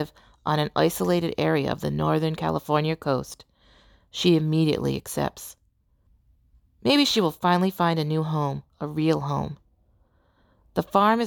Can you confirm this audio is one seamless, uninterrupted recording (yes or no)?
yes